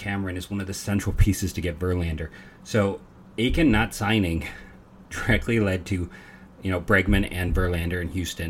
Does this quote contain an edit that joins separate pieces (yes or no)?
no